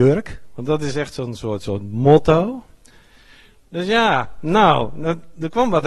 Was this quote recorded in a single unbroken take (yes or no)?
yes